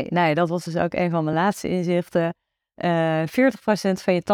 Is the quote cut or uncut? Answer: uncut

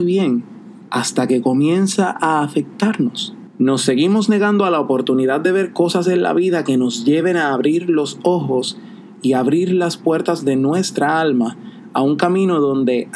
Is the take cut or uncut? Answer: uncut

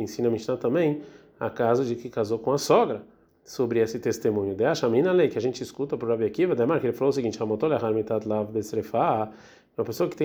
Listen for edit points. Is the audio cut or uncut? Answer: uncut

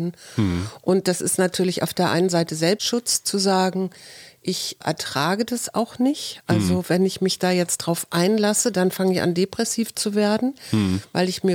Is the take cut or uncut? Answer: uncut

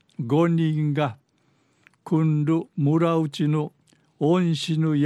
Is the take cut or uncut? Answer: cut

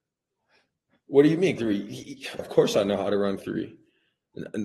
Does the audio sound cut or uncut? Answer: cut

